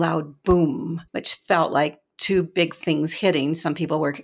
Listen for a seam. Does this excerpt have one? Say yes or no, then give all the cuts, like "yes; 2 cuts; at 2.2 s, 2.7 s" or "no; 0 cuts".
yes; 1 cut; at 1.1 s